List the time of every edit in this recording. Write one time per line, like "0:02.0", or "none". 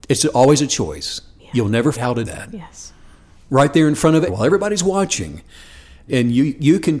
0:01.9
0:02.2
0:04.3
0:06.1

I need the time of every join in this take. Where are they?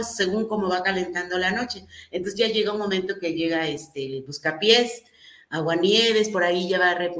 none

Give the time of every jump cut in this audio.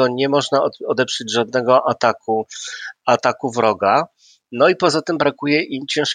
none

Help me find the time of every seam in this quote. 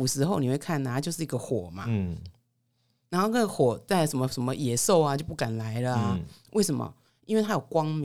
none

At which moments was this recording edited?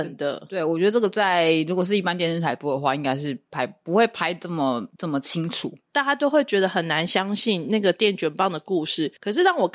none

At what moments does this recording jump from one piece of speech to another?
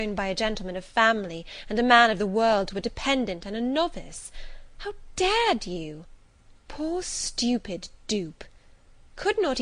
none

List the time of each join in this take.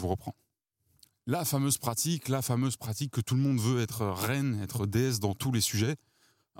none

